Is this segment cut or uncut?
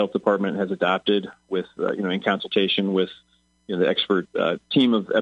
uncut